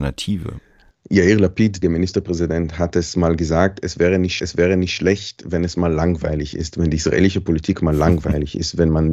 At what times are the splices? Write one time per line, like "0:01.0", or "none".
0:01.8
0:04.4